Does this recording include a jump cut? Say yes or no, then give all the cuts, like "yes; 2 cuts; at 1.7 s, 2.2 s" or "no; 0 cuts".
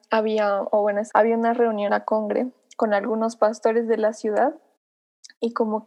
yes; 2 cuts; at 1.1 s, 1.9 s